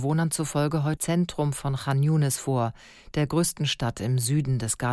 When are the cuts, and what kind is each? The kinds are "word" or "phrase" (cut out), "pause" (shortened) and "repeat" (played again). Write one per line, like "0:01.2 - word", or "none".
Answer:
0:01.0 - word

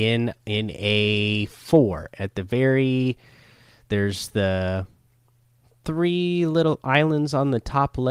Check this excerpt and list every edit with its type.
none

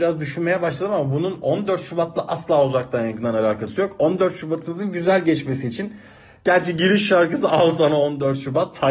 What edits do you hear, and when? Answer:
none

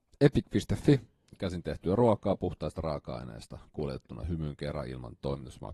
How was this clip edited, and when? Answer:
none

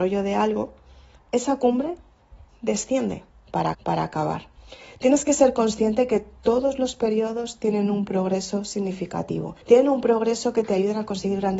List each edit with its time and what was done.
0:01.2 - phrase
0:03.7 - repeat
0:09.6 - pause

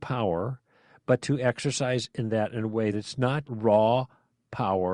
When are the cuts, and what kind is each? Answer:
0:02.1 - word
0:02.9 - word
0:03.4 - word

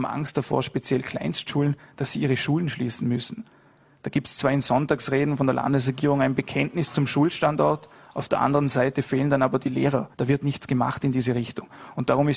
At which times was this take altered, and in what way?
0:10.1 - pause

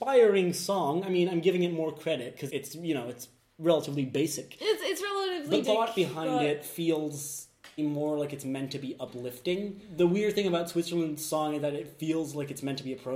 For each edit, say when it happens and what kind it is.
0:02.5 - word
0:05.6 - word
0:07.8 - word

